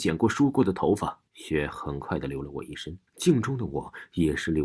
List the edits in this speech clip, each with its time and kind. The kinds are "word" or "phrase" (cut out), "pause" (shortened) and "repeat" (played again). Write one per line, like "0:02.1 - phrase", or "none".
0:01.3 - pause
0:03.1 - pause